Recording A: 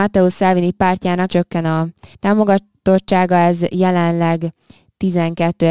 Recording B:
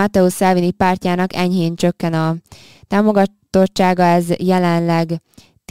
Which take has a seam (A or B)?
A